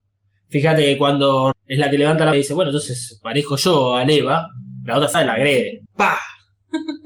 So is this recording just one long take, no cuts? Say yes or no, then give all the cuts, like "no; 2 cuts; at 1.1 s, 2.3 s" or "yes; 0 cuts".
no; 4 cuts; at 1.5 s, 2.3 s, 5.1 s, 5.9 s